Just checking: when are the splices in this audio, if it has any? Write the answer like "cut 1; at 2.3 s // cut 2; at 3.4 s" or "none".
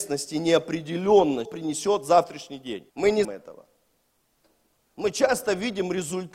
cut 1; at 1.5 s // cut 2; at 2.9 s // cut 3; at 3.2 s